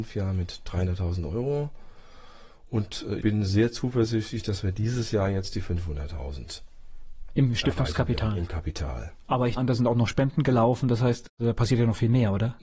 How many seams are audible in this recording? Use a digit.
2